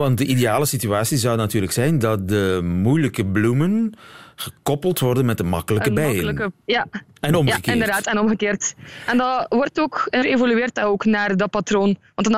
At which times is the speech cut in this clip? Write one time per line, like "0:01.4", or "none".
0:06.6
0:10.2